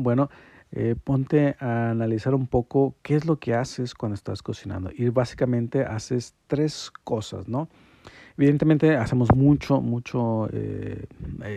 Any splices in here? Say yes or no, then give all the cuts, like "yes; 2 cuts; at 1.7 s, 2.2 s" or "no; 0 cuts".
no; 0 cuts